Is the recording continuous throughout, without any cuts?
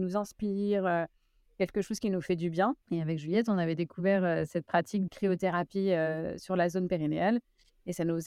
no; 2 cuts; at 2.8 s, 5.1 s

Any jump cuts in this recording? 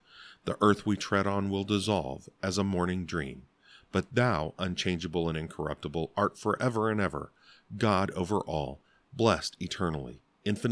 no; 0 cuts

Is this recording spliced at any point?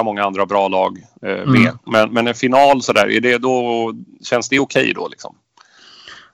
no; 0 cuts

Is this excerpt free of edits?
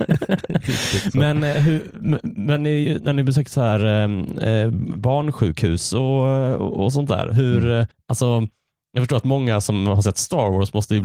no; 1 cut; at 7.9 s

